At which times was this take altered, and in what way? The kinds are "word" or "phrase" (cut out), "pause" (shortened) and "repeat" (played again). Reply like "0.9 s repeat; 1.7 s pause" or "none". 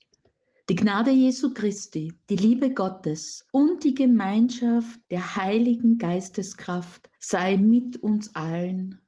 2.2 s pause; 3.5 s pause; 5.0 s pause; 7.1 s pause